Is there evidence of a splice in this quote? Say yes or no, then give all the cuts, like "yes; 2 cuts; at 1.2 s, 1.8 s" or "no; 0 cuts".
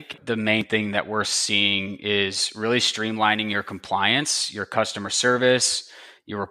no; 0 cuts